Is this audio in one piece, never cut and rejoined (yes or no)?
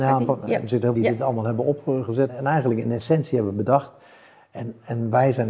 no